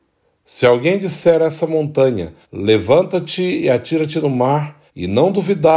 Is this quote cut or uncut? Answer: cut